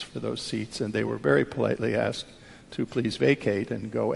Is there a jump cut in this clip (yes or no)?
no